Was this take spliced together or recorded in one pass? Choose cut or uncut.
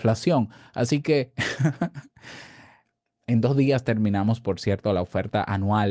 uncut